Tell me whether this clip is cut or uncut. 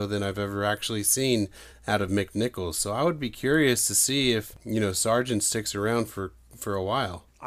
uncut